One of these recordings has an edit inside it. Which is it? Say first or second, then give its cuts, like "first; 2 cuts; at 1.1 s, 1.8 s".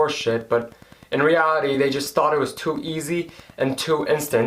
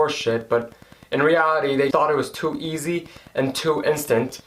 second; 1 cut; at 1.9 s